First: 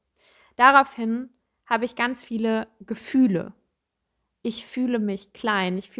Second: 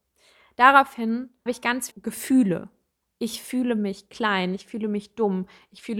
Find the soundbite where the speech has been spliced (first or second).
second